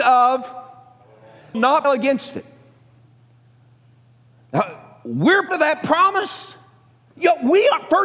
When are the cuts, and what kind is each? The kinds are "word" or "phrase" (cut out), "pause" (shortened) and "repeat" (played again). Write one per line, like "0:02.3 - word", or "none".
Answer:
0:01.5 - word
0:01.8 - word
0:05.5 - word